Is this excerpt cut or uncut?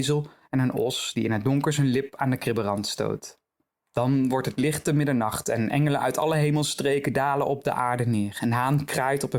uncut